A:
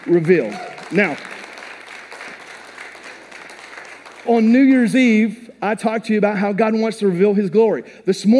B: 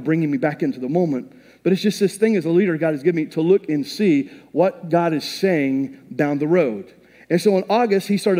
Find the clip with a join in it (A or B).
A